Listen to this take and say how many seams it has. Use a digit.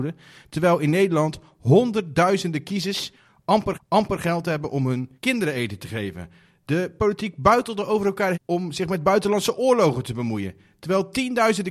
3